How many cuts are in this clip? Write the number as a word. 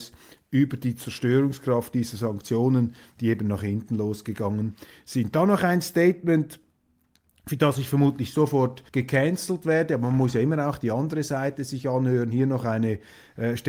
one